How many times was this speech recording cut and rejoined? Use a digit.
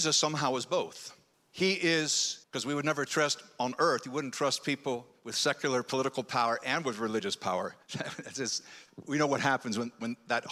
3